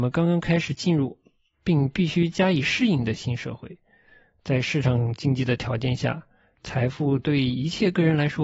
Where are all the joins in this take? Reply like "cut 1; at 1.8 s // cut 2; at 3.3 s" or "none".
none